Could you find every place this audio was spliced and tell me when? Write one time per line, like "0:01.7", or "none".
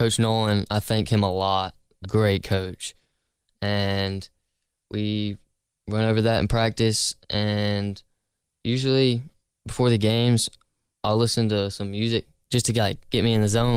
0:02.0